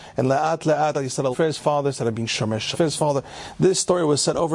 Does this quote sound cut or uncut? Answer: cut